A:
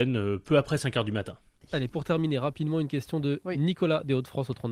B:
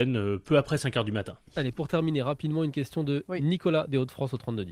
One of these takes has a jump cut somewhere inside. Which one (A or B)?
B